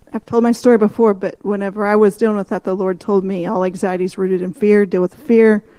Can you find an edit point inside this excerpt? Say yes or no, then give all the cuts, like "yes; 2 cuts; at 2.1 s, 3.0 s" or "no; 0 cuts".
no; 0 cuts